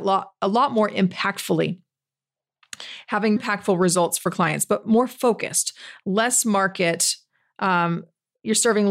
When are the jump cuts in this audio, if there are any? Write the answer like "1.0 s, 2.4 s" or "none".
3.4 s